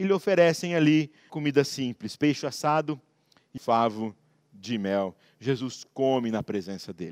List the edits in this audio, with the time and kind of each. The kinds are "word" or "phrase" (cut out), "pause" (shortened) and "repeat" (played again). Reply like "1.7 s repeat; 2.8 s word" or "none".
1.3 s word; 3.6 s word